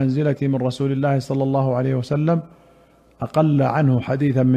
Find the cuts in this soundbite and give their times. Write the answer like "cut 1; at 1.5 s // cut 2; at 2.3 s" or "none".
none